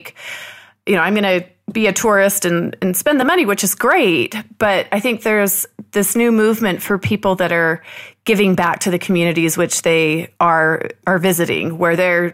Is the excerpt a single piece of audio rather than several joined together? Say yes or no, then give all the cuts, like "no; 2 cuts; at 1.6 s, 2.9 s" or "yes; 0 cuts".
no; 1 cut; at 10.4 s